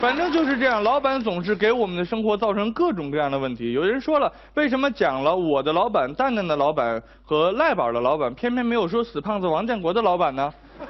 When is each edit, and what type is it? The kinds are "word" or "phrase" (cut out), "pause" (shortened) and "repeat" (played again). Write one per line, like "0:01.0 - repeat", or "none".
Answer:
none